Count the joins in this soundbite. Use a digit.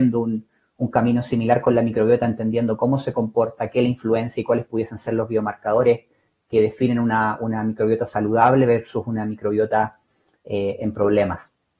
0